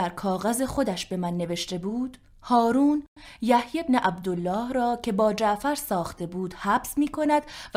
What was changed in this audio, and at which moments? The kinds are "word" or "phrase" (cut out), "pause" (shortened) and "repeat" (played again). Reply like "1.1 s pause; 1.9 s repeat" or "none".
none